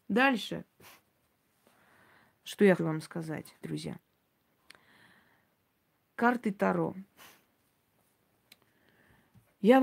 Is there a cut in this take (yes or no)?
yes